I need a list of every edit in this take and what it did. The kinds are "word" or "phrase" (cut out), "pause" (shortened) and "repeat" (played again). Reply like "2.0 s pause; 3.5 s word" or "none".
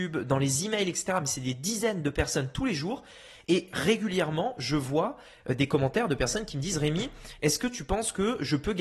none